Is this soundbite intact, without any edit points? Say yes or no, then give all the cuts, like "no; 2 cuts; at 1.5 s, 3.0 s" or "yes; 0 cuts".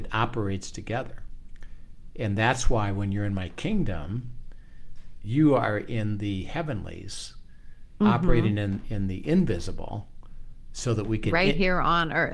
yes; 0 cuts